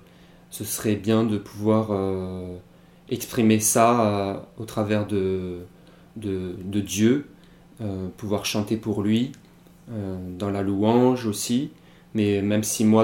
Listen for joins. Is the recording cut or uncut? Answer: uncut